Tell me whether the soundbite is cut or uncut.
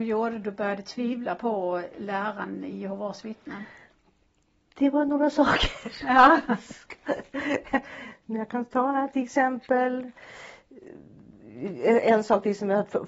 uncut